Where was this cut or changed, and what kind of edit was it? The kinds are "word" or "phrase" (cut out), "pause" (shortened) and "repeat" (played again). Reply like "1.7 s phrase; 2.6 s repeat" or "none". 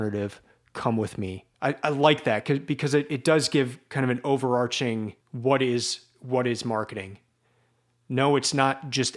1.5 s pause; 5.2 s pause